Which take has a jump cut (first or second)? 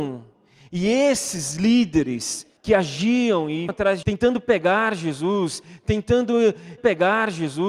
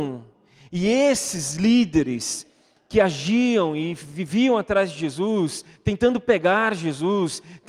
first